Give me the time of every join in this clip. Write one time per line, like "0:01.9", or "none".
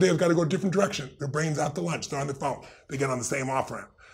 none